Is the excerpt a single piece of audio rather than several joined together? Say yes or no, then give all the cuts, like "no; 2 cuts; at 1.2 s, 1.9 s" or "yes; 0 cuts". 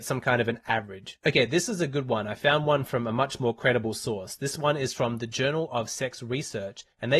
yes; 0 cuts